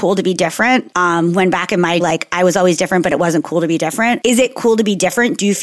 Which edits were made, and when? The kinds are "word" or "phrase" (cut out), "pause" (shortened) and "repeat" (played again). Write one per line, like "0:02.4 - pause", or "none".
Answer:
0:02.0 - word